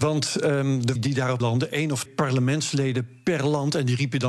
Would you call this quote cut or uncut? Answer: cut